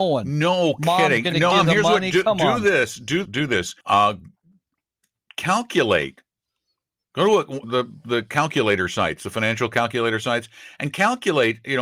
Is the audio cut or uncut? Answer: cut